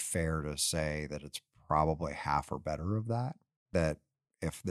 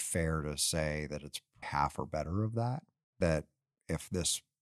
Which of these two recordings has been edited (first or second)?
second